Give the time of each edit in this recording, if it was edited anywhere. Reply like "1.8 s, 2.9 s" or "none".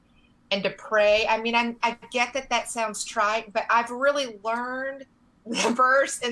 5.2 s